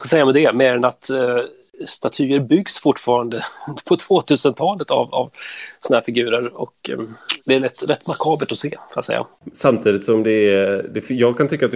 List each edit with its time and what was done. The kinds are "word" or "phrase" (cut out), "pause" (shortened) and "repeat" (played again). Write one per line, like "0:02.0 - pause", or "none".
0:07.4 - pause

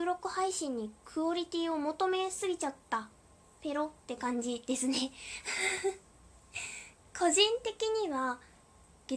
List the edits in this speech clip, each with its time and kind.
0:02.8 - pause

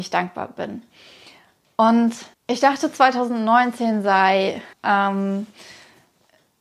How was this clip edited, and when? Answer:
0:02.3 - pause
0:04.7 - pause

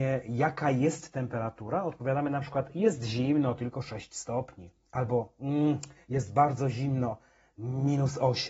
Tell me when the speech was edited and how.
none

